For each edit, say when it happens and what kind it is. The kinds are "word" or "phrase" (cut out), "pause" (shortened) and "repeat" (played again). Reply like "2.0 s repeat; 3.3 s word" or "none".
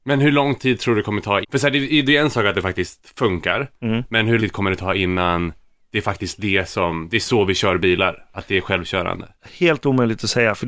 1.4 s word; 4.4 s word

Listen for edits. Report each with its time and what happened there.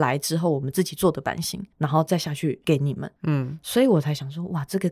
1.7 s pause; 3.2 s pause

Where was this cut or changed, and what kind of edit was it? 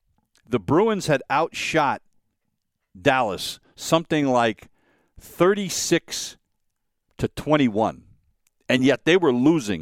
none

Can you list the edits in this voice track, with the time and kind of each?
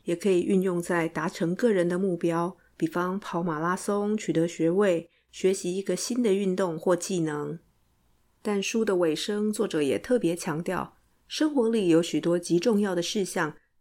none

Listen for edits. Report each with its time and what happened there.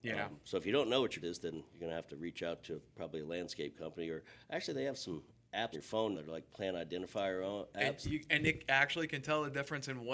1.2 s word; 5.7 s word; 6.1 s word

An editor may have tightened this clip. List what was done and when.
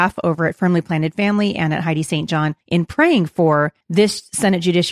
2.6 s pause; 3.8 s pause

